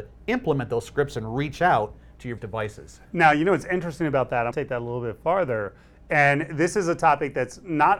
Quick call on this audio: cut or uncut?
cut